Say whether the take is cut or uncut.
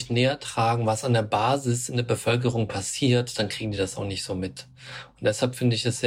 uncut